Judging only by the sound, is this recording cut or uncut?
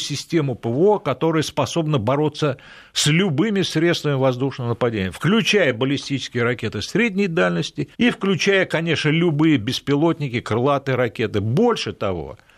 cut